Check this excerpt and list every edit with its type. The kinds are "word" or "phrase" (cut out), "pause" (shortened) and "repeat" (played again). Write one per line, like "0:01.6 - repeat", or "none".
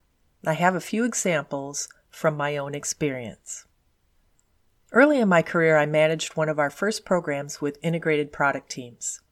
none